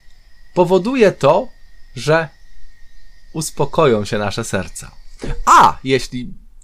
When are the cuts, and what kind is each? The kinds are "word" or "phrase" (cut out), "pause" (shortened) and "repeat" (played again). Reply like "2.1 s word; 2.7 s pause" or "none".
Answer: none